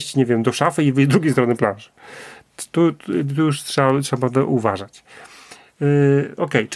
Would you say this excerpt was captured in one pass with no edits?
yes; 0 cuts

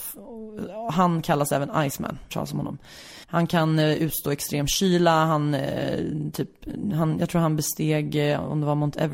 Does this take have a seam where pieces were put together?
yes; 2 cuts; at 2.3 s, 3.2 s

